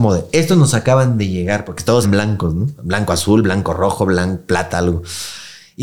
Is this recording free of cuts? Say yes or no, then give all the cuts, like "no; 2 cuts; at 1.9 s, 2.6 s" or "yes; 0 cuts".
no; 1 cut; at 2.0 s